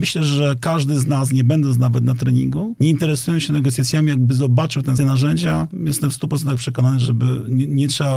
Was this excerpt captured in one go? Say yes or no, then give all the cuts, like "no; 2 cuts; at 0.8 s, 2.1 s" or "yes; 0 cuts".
no; 1 cut; at 5.0 s